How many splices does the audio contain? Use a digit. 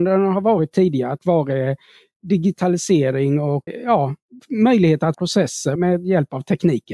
4